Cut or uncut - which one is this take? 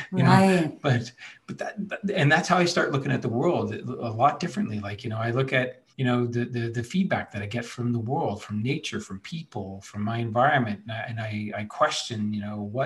cut